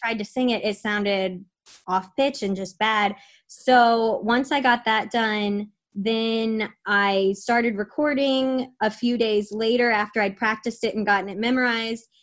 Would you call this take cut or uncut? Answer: uncut